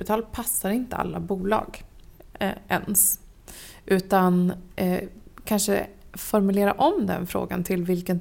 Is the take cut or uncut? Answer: uncut